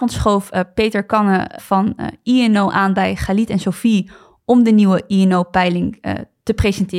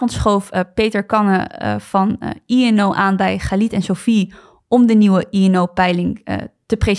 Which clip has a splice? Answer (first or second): first